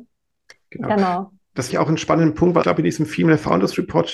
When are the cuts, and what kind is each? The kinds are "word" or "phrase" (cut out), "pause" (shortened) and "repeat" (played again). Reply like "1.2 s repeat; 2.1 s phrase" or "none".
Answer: 1.7 s word; 2.6 s word